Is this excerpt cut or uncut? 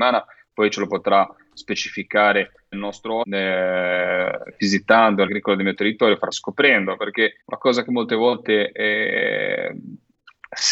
cut